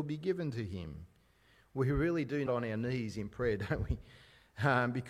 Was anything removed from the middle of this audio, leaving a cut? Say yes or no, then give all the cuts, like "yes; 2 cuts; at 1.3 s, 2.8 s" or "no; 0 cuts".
yes; 1 cut; at 2.5 s